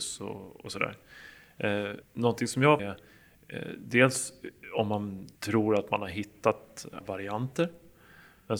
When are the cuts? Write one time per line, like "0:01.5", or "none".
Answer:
0:02.0
0:02.8
0:05.4
0:07.0

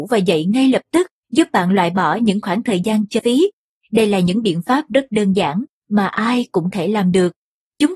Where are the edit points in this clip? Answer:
0:03.2
0:06.7

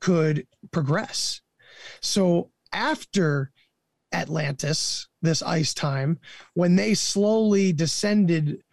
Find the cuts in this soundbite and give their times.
none

